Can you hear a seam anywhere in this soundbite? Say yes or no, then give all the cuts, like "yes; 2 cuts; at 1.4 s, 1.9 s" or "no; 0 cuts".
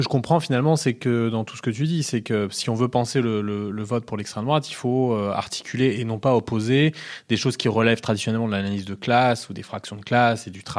no; 0 cuts